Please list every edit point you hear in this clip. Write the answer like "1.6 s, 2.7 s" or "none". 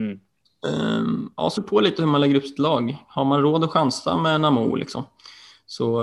1.6 s